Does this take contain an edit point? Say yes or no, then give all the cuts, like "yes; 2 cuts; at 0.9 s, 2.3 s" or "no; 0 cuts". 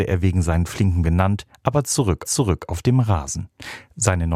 yes; 2 cuts; at 1.0 s, 2.3 s